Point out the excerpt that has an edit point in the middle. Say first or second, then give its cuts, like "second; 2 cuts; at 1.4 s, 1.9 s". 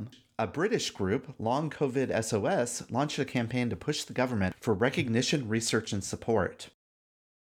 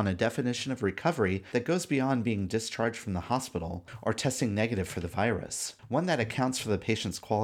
second; 1 cut; at 5.8 s